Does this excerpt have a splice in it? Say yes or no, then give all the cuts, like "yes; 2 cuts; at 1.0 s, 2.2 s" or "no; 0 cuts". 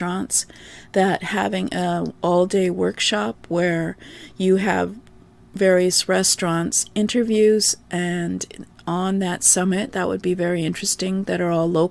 no; 0 cuts